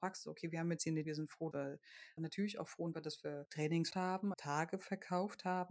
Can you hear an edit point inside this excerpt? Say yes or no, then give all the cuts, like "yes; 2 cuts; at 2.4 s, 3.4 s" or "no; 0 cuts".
yes; 6 cuts; at 1.0 s, 1.5 s, 2.2 s, 2.9 s, 3.9 s, 4.3 s